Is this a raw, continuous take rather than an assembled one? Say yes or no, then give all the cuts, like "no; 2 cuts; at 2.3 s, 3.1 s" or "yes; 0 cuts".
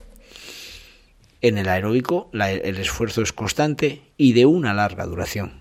yes; 0 cuts